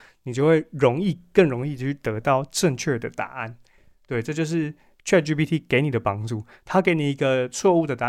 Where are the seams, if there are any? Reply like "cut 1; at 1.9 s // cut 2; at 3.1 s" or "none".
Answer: none